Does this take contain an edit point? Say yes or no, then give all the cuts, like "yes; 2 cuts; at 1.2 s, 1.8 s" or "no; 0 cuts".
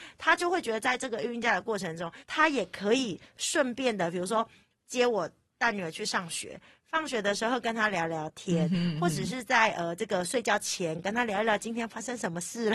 yes; 1 cut; at 2.2 s